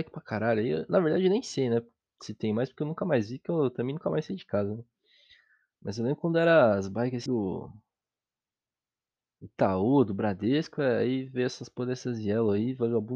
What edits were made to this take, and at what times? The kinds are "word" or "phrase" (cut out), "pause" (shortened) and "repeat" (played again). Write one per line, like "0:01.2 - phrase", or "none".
0:07.3 - word